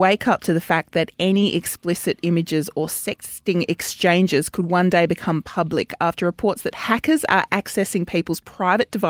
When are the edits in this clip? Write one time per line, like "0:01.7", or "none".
none